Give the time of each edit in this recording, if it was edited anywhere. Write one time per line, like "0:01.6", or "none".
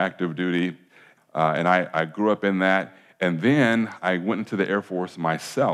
0:01.2